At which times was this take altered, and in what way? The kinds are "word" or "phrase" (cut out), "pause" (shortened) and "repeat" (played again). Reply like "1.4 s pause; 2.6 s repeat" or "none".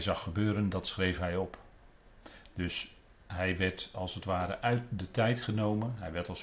none